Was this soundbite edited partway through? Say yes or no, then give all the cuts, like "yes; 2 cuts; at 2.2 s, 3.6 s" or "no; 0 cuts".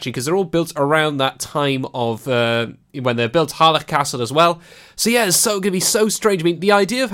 no; 0 cuts